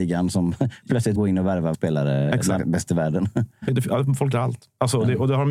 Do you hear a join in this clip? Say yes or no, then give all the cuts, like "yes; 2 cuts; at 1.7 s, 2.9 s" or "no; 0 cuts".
yes; 5 cuts; at 1.2 s, 1.7 s, 2.6 s, 3.7 s, 4.3 s